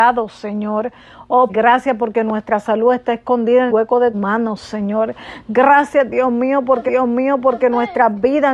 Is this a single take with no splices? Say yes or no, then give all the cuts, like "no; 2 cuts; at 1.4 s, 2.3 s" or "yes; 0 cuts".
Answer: no; 4 cuts; at 1.5 s, 3.7 s, 4.1 s, 6.9 s